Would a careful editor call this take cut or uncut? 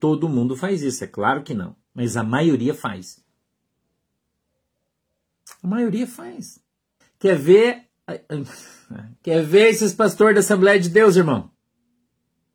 cut